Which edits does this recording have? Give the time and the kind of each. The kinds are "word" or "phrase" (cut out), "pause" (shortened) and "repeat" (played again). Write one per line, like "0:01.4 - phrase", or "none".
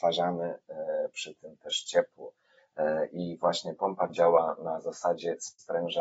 0:04.1 - word